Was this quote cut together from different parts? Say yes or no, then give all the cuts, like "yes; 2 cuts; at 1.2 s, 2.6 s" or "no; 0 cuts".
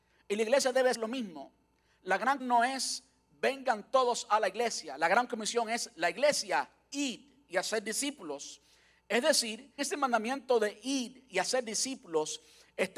yes; 3 cuts; at 0.9 s, 2.4 s, 9.8 s